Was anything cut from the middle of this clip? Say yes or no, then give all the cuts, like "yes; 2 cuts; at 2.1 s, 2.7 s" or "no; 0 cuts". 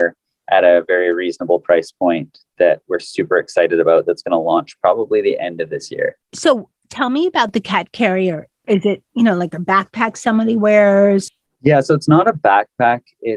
yes; 1 cut; at 6.2 s